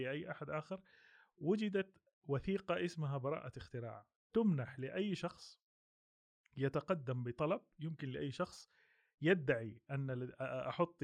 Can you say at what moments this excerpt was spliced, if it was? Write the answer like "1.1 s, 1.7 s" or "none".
none